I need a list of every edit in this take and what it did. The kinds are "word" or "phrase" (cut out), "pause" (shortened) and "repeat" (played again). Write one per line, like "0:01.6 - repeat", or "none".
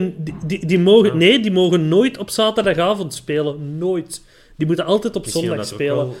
none